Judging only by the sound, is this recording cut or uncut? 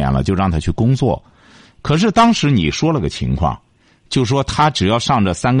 uncut